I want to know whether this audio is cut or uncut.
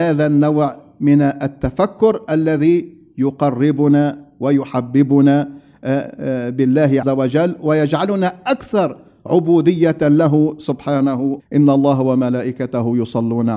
cut